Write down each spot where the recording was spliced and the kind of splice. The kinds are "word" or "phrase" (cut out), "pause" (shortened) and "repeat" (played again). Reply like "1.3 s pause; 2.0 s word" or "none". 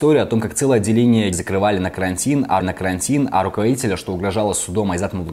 1.3 s word; 2.6 s repeat